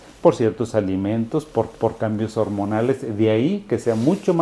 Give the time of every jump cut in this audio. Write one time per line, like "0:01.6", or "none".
0:01.7